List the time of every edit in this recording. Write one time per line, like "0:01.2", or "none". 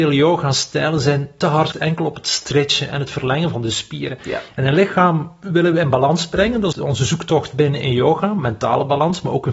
0:01.7
0:06.7